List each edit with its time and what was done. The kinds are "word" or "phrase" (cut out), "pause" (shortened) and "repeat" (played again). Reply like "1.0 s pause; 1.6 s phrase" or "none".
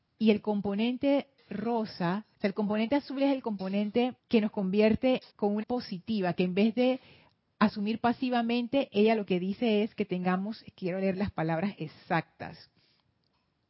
2.3 s pause; 4.2 s pause; 5.3 s pause; 5.6 s word